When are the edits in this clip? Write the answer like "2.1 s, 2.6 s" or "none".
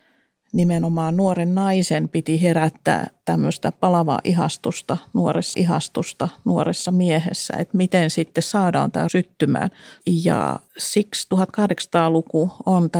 5.5 s, 9.1 s, 10.7 s